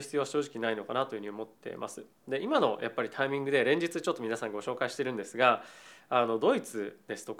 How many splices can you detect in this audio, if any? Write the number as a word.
zero